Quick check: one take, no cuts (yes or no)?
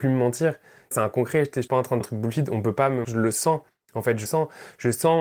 no